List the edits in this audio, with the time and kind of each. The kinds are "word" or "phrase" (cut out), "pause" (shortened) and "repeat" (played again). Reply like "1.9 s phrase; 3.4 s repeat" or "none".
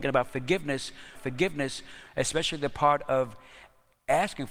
1.1 s repeat